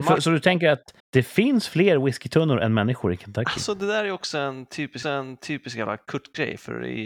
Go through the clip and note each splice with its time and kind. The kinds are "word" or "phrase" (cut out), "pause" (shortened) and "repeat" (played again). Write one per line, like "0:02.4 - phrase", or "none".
0:01.0 - pause
0:05.0 - repeat